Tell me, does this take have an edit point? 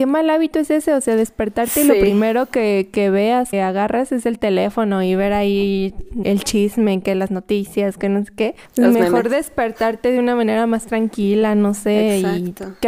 yes; 3 cuts; at 3.5 s, 6.2 s, 8.7 s

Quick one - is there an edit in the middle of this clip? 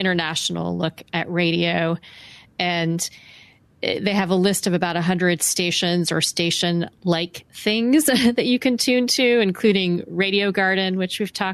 no; 0 cuts

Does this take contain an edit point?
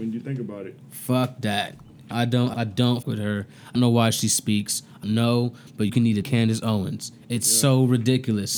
yes; 7 cuts; at 2.1 s, 2.5 s, 3.0 s, 3.8 s, 5.0 s, 5.9 s, 6.2 s

